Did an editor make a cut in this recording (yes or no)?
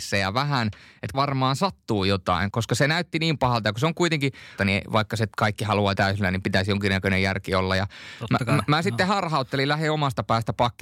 yes